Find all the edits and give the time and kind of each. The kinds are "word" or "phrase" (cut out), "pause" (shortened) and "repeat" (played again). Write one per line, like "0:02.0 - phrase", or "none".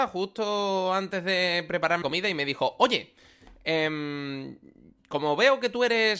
0:02.0 - word